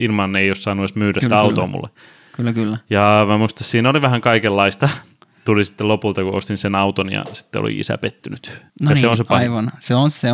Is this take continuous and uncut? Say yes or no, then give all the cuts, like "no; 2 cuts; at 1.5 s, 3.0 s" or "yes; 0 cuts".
no; 1 cut; at 8.7 s